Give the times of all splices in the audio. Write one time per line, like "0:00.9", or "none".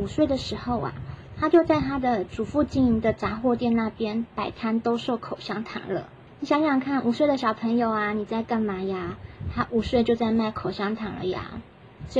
0:06.3